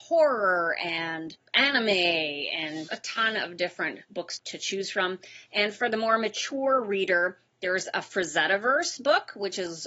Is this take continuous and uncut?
no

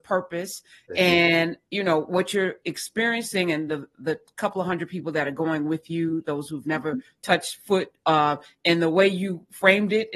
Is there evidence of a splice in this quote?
no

